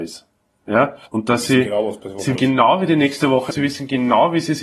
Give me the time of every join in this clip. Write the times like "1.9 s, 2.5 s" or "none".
1.1 s, 2.3 s, 3.5 s

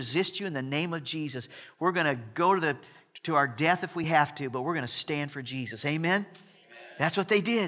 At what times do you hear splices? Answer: none

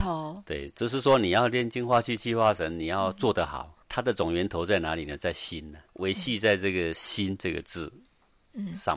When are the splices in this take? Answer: 3.8 s, 5.9 s

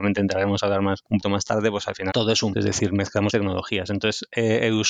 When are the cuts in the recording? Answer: 1.2 s, 2.1 s, 2.5 s, 3.3 s

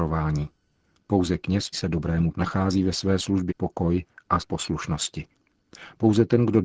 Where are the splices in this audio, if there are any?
1.7 s, 2.3 s, 3.5 s, 4.4 s

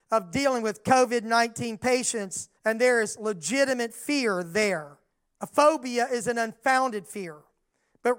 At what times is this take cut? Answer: 2.6 s, 5.1 s

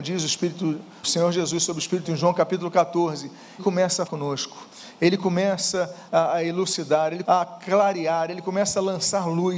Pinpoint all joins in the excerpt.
1.0 s, 2.0 s, 3.6 s, 4.1 s, 6.1 s, 7.2 s

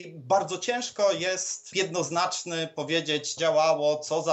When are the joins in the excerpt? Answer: 1.7 s, 3.4 s

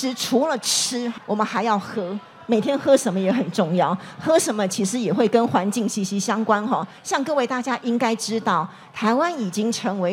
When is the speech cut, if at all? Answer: 1.2 s, 7.0 s

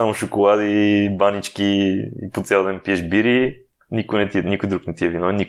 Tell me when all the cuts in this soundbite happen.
none

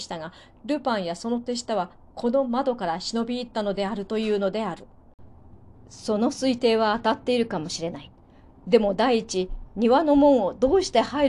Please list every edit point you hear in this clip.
none

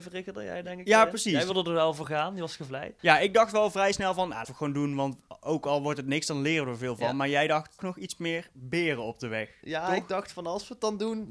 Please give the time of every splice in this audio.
3.0 s, 4.4 s, 7.8 s

